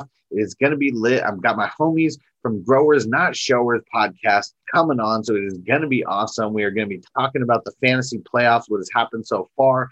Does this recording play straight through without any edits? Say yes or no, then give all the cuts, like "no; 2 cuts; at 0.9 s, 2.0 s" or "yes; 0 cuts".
no; 1 cut; at 4.6 s